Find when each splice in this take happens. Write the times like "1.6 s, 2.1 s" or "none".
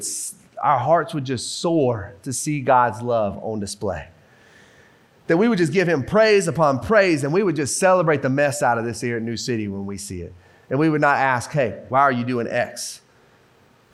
none